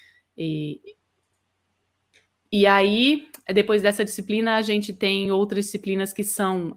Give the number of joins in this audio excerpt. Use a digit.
0